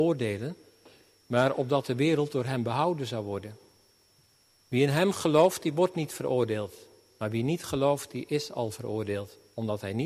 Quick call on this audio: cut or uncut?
uncut